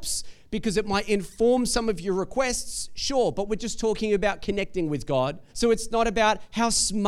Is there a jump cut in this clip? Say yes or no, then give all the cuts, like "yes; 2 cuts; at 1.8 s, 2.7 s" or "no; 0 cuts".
yes; 1 cut; at 5.5 s